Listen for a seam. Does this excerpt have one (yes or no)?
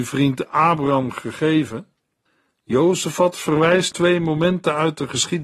yes